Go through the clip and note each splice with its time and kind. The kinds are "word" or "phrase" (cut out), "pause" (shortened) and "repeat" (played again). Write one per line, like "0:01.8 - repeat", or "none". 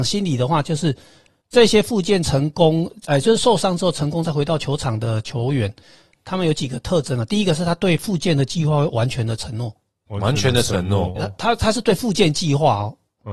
0:10.1 - word
0:11.2 - word